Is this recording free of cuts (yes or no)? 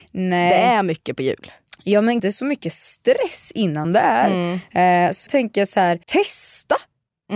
no